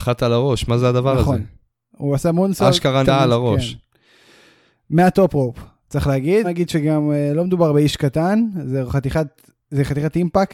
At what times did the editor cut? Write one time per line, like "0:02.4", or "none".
0:03.0
0:06.4